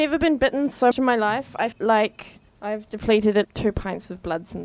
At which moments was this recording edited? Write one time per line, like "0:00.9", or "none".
0:00.9
0:01.7
0:02.5
0:03.4